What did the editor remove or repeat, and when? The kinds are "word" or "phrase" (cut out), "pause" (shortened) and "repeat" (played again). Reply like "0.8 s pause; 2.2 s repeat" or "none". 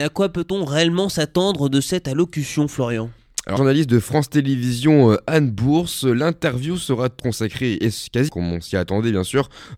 3.6 s phrase; 7.2 s word; 8.3 s word